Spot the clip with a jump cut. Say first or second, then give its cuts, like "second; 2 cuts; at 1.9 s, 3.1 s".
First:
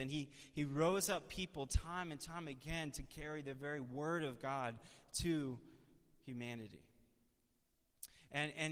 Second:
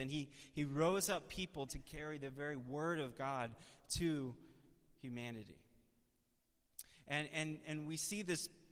second; 1 cut; at 1.7 s